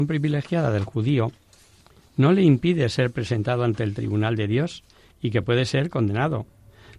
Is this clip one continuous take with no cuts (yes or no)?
yes